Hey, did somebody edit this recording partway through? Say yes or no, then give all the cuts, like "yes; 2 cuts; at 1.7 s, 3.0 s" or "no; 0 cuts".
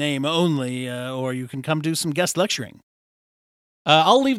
no; 0 cuts